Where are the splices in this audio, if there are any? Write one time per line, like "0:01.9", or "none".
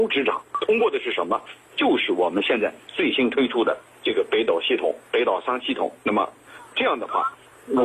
0:05.1